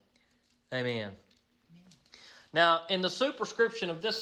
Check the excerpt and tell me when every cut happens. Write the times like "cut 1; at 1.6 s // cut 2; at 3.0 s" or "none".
none